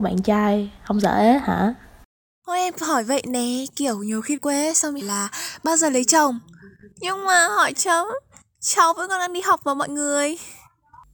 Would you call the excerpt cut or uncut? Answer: cut